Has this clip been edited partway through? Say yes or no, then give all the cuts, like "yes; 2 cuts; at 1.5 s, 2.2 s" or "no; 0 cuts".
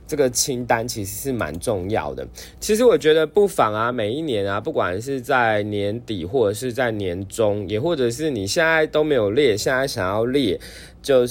no; 0 cuts